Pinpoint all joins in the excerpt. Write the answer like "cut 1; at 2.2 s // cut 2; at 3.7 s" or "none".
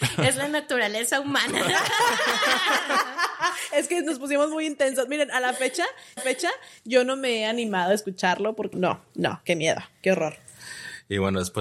cut 1; at 6.2 s // cut 2; at 8.7 s